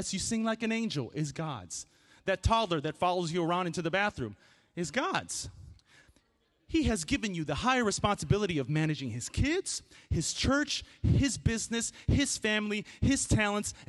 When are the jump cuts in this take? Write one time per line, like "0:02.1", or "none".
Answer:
none